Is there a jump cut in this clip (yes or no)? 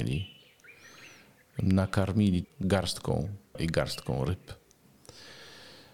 yes